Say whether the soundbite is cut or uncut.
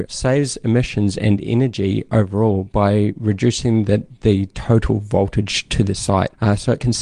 uncut